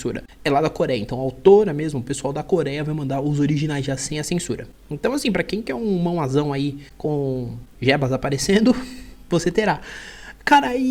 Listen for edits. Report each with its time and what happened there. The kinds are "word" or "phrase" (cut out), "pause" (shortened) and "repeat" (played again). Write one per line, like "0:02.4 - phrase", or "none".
none